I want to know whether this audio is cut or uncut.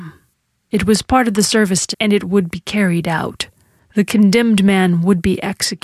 cut